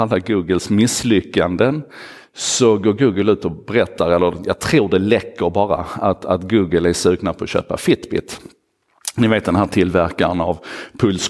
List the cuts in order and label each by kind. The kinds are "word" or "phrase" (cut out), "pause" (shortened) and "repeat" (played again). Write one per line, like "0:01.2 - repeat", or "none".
none